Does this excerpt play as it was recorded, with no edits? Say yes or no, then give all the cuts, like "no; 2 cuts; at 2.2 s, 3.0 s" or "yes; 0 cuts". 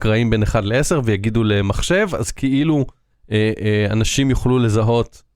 yes; 0 cuts